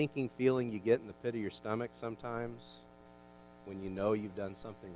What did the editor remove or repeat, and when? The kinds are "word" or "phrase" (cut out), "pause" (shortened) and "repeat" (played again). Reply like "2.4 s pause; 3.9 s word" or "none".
none